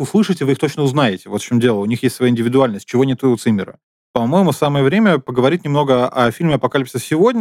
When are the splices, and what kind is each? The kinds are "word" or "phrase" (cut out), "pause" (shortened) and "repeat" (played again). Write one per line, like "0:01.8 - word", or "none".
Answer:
none